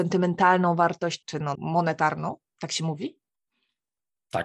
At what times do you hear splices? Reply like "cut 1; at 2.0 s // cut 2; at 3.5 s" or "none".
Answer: cut 1; at 1.2 s // cut 2; at 1.5 s